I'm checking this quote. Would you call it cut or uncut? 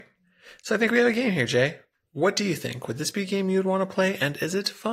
uncut